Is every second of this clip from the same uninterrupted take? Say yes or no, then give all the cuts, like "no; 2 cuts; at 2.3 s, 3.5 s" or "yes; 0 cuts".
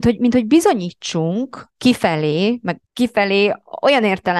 no; 2 cuts; at 1.7 s, 2.9 s